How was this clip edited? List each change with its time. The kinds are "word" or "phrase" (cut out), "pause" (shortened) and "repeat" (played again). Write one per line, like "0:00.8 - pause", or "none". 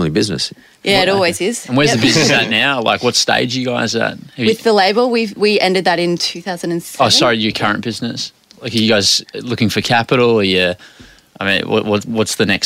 none